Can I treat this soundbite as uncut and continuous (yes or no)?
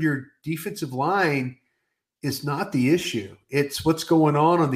yes